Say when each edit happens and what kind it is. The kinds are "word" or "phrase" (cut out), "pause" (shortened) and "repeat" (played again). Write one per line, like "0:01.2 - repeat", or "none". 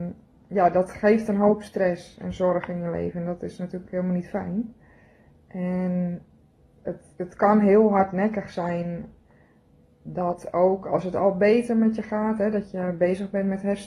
none